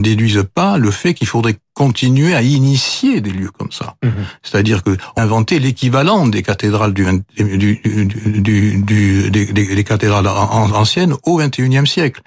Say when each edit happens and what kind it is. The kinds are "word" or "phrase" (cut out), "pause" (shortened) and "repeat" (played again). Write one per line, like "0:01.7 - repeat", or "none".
0:05.2 - word